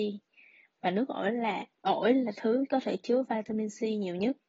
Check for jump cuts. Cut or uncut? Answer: cut